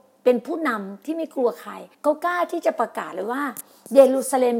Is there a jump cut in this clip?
yes; 1 cut; at 1.9 s

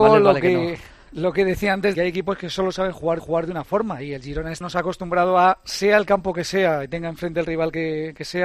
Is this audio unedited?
no; 3 cuts; at 1.9 s, 3.2 s, 4.6 s

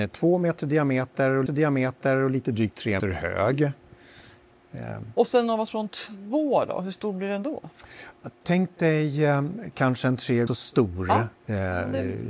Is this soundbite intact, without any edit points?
no; 4 cuts; at 1.5 s, 3.0 s, 10.5 s, 11.4 s

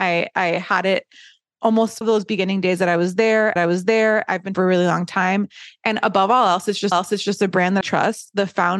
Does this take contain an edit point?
yes; 5 cuts; at 2.0 s, 3.6 s, 4.5 s, 6.9 s, 7.8 s

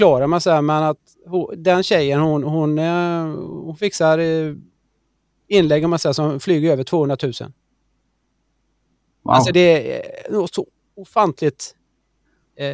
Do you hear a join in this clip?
yes; 1 cut; at 9.5 s

